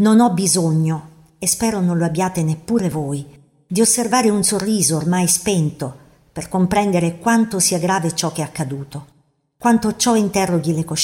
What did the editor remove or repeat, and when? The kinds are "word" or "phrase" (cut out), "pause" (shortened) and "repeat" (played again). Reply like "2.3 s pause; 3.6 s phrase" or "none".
none